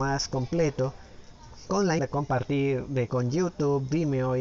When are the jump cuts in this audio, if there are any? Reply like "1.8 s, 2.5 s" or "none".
2.0 s, 3.1 s